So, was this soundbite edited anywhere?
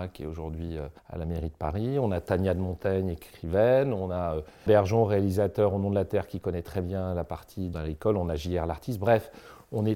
yes; 3 cuts; at 1.0 s, 4.7 s, 7.7 s

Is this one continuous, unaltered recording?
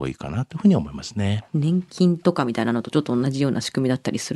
no; 1 cut; at 1.5 s

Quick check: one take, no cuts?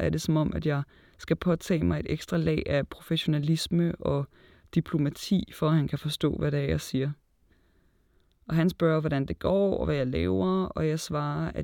yes; 0 cuts

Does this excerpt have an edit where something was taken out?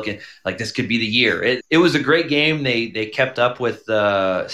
yes; 1 cut; at 1.6 s

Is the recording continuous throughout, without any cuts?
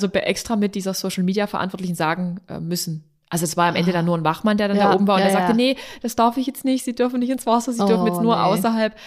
yes; 0 cuts

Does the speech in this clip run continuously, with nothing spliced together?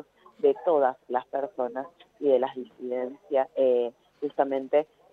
yes; 0 cuts

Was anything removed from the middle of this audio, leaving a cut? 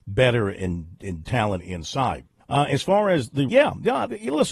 yes; 3 cuts; at 1.2 s, 2.4 s, 3.5 s

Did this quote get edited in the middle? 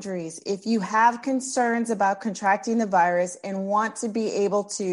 no; 0 cuts

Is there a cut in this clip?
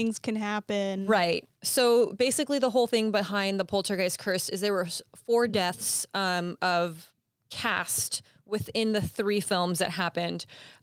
no; 0 cuts

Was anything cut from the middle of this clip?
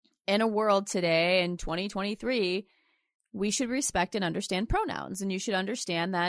no; 0 cuts

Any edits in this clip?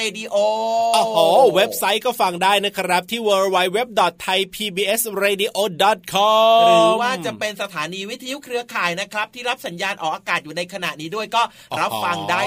no; 0 cuts

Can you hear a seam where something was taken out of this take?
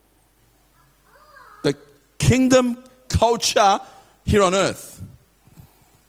no; 0 cuts

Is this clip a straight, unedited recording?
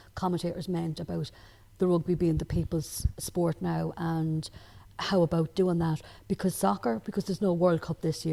yes; 0 cuts

